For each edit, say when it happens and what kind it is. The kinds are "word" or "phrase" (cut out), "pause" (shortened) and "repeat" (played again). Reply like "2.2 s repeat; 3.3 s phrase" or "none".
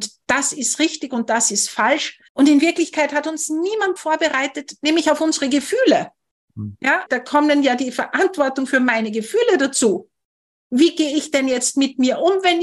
2.3 s pause; 4.0 s word; 7.1 s word